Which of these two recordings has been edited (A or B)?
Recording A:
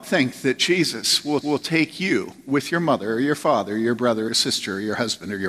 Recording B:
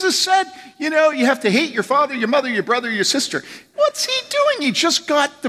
A